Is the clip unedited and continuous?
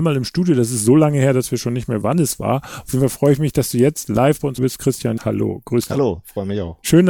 no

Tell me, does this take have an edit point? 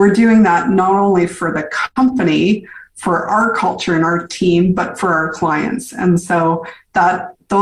no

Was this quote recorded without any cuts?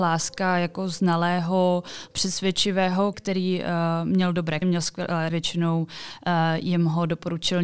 no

